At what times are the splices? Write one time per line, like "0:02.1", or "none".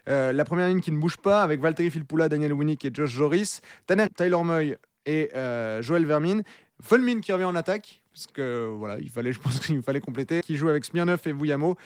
0:04.1
0:10.4